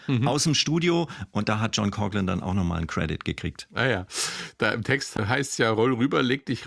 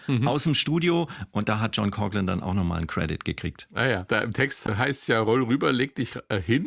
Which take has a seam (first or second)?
second